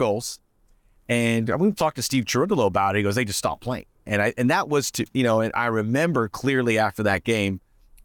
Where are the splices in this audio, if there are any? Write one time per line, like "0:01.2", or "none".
none